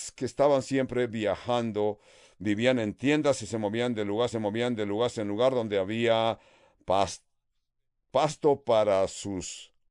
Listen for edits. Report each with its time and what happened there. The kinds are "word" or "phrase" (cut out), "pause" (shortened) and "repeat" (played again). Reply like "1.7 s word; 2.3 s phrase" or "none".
4.3 s repeat